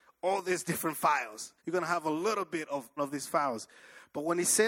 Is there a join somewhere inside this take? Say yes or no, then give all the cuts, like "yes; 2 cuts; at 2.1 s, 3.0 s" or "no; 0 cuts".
yes; 2 cuts; at 1.6 s, 3.0 s